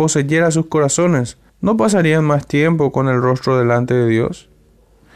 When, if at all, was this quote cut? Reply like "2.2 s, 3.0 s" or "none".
1.5 s